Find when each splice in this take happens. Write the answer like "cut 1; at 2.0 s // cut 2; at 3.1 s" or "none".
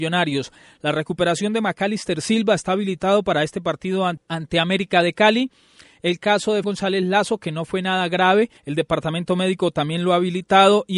cut 1; at 6.6 s // cut 2; at 8.6 s